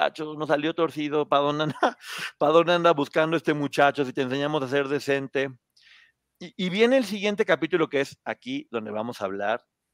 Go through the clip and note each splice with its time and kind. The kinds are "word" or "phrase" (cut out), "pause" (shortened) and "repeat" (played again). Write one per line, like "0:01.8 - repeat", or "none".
none